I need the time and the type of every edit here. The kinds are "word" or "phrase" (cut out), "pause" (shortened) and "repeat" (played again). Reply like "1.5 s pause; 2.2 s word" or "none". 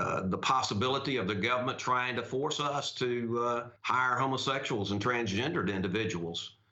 3.8 s pause